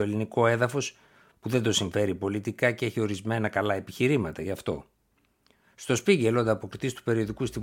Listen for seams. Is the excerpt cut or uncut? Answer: uncut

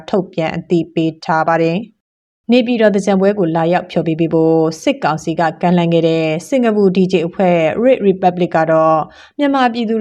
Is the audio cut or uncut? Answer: uncut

